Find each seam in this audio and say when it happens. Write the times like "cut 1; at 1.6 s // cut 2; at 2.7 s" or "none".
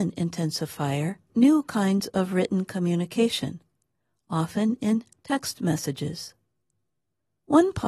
cut 1; at 1.3 s